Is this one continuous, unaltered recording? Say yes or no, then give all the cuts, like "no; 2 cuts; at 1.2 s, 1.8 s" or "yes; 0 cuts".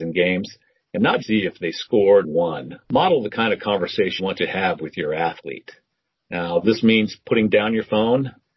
no; 4 cuts; at 1.2 s, 2.2 s, 2.8 s, 4.2 s